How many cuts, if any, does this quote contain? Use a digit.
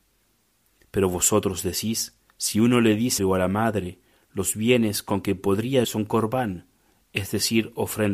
3